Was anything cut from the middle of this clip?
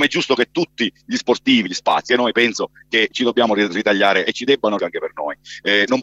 yes; 4 cuts; at 1.7 s, 2.1 s, 3.1 s, 4.8 s

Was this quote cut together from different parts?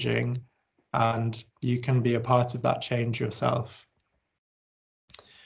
yes; 1 cut; at 1.5 s

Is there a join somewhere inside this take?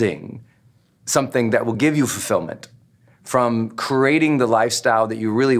no; 0 cuts

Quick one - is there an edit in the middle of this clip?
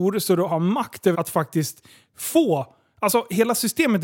yes; 1 cut; at 1.1 s

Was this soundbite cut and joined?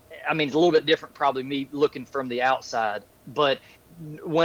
no; 0 cuts

